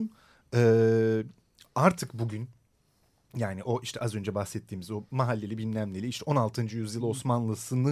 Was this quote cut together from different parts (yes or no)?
no